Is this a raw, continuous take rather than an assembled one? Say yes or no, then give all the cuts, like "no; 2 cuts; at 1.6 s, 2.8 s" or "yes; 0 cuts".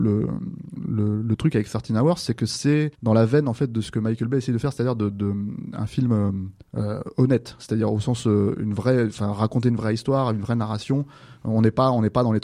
no; 2 cuts; at 2.9 s, 6.6 s